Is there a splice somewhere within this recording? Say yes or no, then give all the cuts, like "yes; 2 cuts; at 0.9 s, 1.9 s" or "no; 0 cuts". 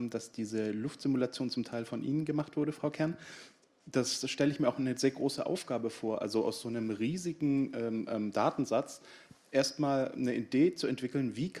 no; 0 cuts